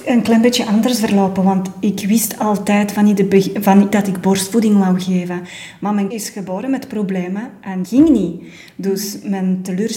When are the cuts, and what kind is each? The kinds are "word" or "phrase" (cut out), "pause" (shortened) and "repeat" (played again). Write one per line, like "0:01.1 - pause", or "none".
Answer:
0:03.9 - phrase
0:06.1 - word
0:07.8 - word